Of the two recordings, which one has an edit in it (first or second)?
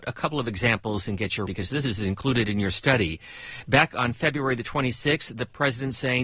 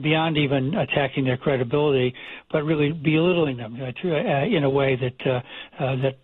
first